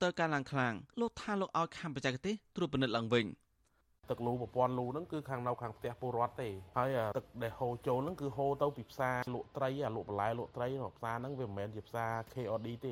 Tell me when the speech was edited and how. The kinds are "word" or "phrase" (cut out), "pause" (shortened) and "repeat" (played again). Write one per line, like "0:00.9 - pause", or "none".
0:00.9 - pause